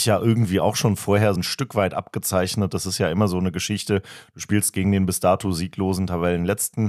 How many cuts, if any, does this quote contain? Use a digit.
1